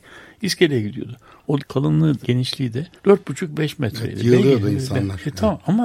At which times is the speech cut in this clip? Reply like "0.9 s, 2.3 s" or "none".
1.6 s, 2.2 s, 3.0 s